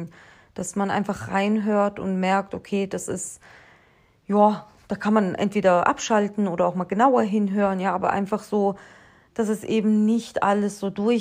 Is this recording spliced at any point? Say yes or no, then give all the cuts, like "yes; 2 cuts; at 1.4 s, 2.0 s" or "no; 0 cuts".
no; 0 cuts